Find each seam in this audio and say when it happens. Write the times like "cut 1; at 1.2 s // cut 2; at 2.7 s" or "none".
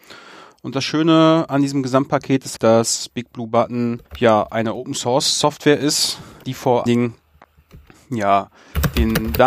cut 1; at 2.6 s // cut 2; at 4.1 s // cut 3; at 6.4 s // cut 4; at 6.9 s